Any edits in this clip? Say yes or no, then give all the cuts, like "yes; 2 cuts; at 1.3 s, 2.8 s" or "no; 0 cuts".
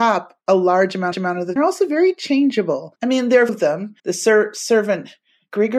yes; 4 cuts; at 1.1 s, 1.6 s, 3.5 s, 4.0 s